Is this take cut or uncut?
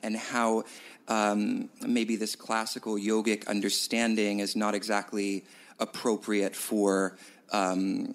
uncut